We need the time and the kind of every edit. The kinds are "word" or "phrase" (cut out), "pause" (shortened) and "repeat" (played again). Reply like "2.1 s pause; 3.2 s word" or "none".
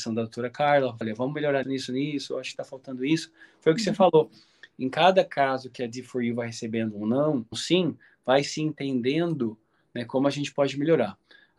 1.0 s word; 1.6 s word; 7.5 s word